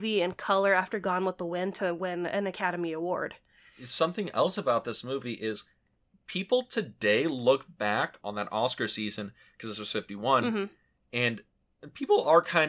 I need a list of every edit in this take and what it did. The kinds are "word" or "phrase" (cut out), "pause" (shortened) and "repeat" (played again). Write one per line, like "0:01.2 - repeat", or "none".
none